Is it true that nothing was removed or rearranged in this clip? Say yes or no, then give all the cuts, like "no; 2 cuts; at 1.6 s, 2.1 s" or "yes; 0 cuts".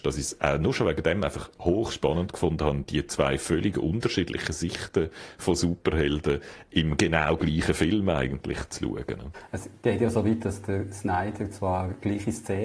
yes; 0 cuts